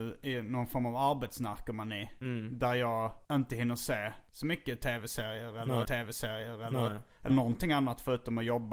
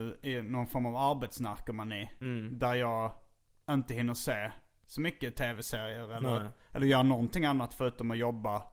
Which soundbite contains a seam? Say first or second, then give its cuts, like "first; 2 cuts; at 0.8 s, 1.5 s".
first; 4 cuts; at 3.2 s, 4.3 s, 5.8 s, 7.3 s